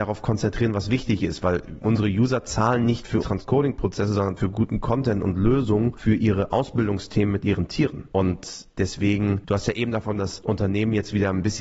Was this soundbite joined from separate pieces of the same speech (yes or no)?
yes